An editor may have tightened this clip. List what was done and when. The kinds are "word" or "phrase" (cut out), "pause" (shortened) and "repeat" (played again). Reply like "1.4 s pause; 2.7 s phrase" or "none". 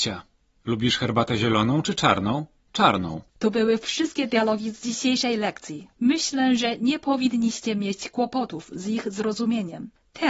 3.3 s pause; 6.0 s pause